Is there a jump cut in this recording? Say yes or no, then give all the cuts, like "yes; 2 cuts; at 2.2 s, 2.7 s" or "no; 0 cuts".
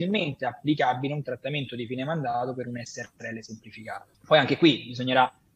yes; 1 cut; at 4.1 s